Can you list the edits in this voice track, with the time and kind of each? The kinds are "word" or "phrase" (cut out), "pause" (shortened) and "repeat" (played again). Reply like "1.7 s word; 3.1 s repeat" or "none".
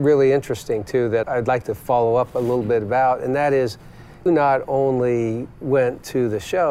1.2 s word; 4.3 s word